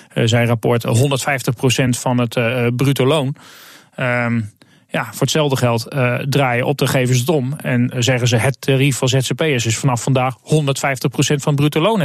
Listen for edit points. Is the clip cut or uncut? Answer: uncut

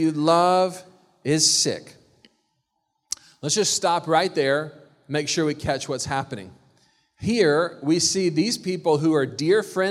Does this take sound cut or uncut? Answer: uncut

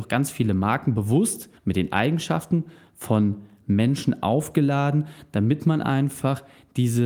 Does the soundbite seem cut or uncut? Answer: cut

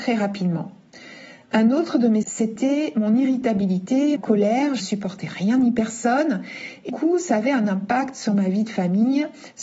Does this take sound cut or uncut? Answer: cut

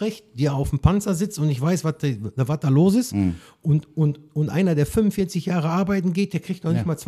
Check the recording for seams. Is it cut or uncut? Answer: uncut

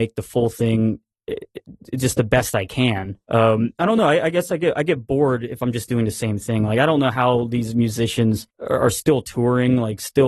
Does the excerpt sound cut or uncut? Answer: cut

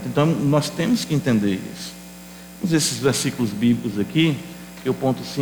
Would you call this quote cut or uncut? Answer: uncut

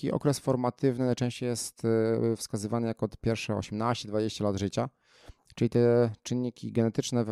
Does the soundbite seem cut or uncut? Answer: uncut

